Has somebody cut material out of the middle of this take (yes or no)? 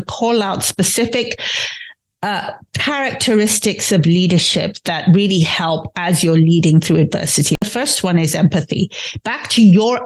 no